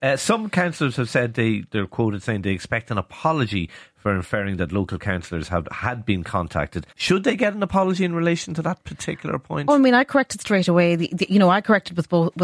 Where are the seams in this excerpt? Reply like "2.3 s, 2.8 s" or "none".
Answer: 6.9 s